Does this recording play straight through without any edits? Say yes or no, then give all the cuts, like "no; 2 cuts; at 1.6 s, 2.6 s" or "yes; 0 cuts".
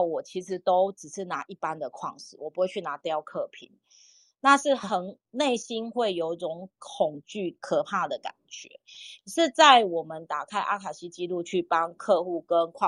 no; 1 cut; at 5.2 s